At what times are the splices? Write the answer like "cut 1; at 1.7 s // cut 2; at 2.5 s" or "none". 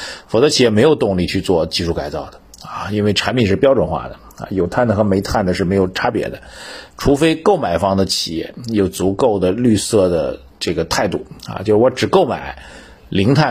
cut 1; at 10.5 s